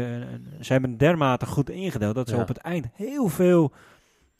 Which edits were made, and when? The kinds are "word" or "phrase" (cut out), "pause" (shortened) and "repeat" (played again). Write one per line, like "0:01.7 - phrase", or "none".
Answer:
none

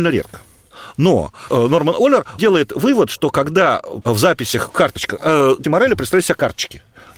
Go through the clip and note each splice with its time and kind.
0:01.5 - word
0:02.4 - word
0:04.0 - word
0:05.6 - word

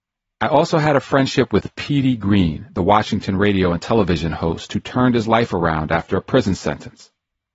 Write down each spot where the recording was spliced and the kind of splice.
none

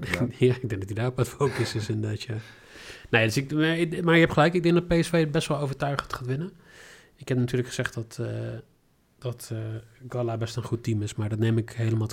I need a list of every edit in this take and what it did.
none

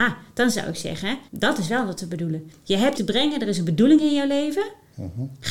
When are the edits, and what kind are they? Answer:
0:01.3 - pause
0:02.9 - word

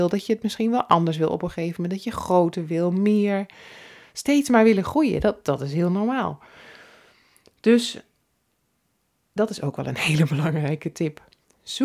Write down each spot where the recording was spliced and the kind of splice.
none

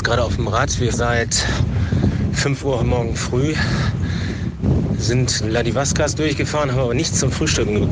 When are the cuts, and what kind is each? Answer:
0:00.9 - word
0:02.8 - word
0:05.4 - word

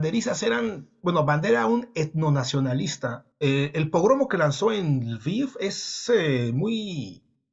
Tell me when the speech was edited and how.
0:03.3 - pause

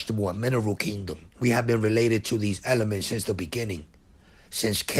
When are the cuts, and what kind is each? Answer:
0:01.3 - pause

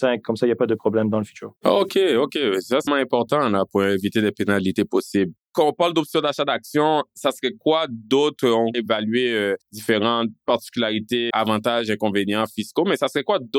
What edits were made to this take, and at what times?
0:01.6 - pause
0:02.9 - word
0:05.4 - pause
0:08.7 - phrase
0:09.6 - pause
0:11.3 - word

